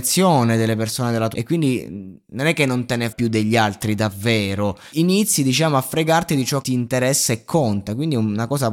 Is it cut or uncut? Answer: cut